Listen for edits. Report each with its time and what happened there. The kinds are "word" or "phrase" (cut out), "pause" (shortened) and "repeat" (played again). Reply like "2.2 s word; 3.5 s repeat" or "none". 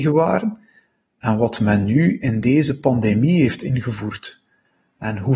none